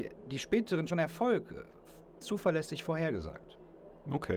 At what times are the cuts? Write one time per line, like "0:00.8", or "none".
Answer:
0:00.9
0:02.2